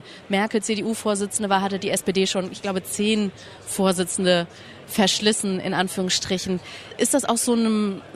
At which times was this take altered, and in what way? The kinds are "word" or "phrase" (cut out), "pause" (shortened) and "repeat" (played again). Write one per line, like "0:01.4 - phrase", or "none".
none